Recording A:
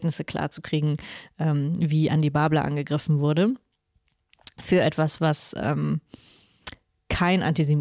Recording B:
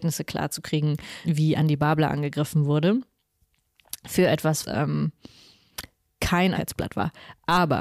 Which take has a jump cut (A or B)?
B